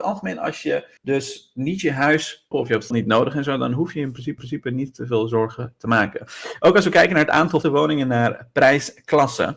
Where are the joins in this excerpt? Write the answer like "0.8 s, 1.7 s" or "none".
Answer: 1.0 s, 2.5 s, 2.9 s, 4.4 s, 7.6 s